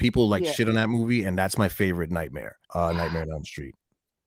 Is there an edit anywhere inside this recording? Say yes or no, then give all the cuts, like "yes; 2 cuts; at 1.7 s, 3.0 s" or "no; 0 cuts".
yes; 1 cut; at 2.6 s